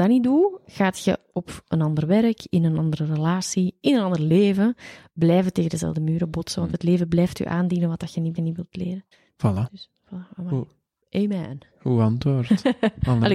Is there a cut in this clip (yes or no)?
yes